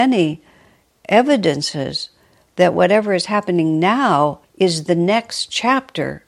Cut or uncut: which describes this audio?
cut